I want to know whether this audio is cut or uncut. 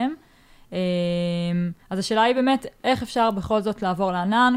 cut